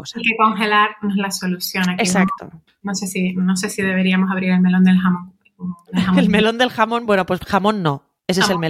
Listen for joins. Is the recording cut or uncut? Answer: uncut